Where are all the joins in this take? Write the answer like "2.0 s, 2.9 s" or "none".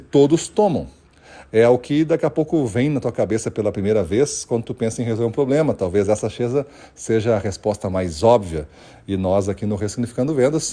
none

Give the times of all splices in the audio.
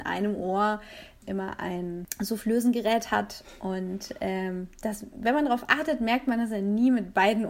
none

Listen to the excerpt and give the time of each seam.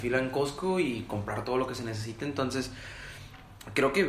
none

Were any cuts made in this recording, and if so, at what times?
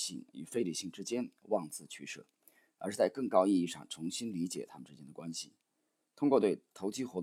none

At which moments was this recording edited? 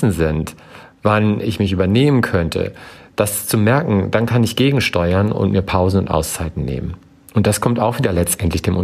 none

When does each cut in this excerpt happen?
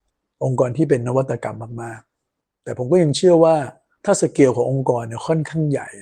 none

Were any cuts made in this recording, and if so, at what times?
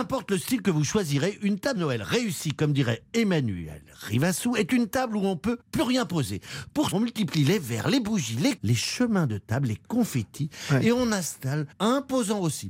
1.8 s, 5.6 s, 6.9 s, 8.6 s, 11.7 s

